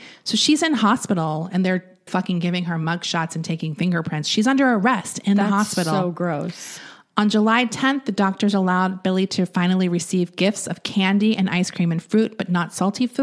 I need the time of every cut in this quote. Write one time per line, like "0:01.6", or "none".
0:02.1